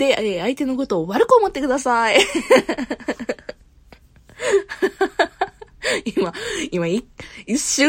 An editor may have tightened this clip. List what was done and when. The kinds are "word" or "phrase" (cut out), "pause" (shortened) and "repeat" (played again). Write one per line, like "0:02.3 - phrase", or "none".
none